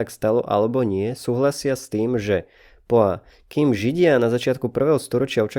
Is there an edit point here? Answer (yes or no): no